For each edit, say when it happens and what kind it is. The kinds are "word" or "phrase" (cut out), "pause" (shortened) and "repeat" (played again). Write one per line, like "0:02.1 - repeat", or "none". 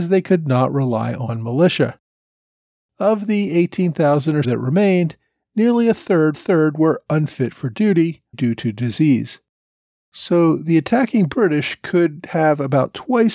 0:04.4 - word
0:06.3 - repeat
0:08.3 - word